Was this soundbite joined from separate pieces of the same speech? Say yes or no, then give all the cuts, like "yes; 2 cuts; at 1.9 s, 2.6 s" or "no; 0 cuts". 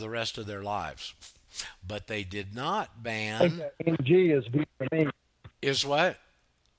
yes; 1 cut; at 5.5 s